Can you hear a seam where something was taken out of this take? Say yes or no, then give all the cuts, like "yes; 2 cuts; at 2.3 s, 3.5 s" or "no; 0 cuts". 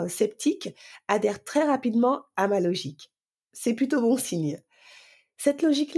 no; 0 cuts